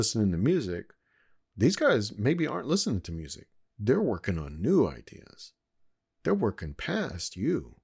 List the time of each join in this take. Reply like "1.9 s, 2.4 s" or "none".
none